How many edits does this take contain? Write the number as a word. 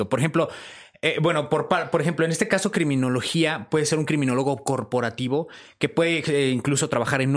zero